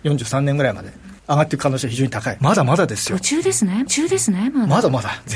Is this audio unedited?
no; 3 cuts; at 1.2 s, 2.4 s, 3.9 s

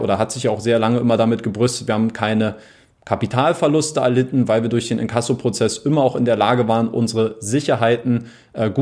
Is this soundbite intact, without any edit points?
yes; 0 cuts

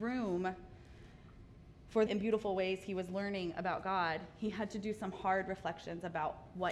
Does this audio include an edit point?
yes; 1 cut; at 2.1 s

